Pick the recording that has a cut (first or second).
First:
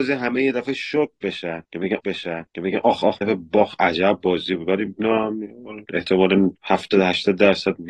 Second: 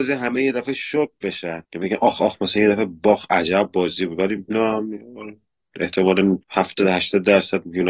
first